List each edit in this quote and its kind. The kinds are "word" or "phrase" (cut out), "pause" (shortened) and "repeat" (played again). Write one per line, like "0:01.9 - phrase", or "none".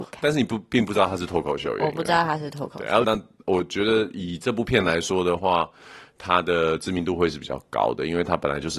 0:03.0 - word